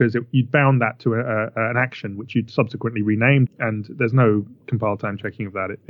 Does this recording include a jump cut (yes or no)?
yes